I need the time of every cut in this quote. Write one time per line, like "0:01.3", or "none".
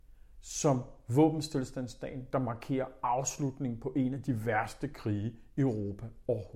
none

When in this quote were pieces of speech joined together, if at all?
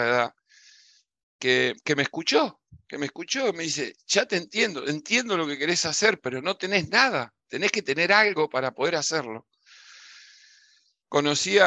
none

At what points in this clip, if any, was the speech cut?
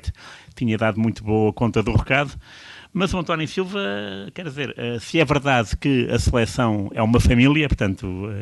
none

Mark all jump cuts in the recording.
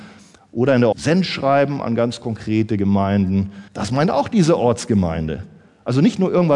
0:00.9
0:03.7

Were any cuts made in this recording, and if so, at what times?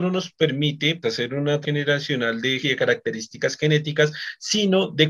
0:01.0
0:01.6
0:02.6

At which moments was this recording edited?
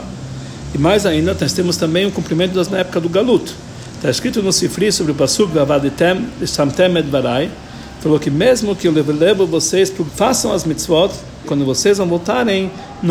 0:02.7
0:10.1
0:11.4

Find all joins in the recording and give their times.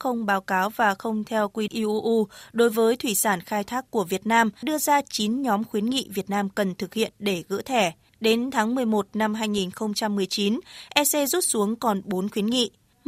0:01.7
0:04.6
0:08.1

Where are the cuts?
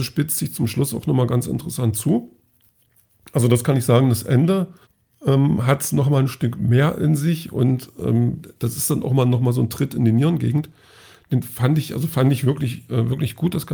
0:04.8

